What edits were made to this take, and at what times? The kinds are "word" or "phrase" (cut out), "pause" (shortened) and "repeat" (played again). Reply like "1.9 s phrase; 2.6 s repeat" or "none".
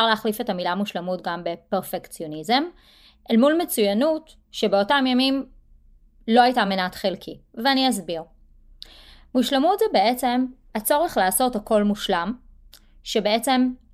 none